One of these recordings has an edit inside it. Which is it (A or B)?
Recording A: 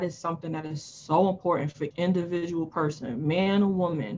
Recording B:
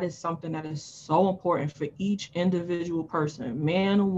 A